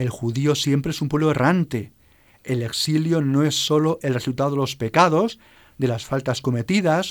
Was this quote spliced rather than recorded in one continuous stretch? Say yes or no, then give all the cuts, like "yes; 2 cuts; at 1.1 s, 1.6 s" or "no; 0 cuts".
no; 0 cuts